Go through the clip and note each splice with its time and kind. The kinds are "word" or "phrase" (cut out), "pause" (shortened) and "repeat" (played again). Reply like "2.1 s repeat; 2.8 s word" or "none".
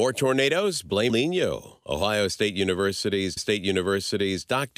1.1 s word; 3.4 s repeat